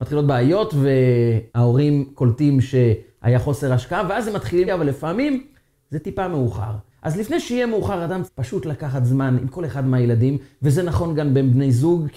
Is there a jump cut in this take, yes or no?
yes